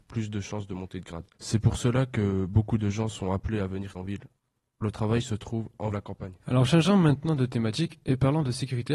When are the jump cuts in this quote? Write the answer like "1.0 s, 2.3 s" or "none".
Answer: 1.3 s, 3.9 s, 4.8 s, 5.9 s, 6.4 s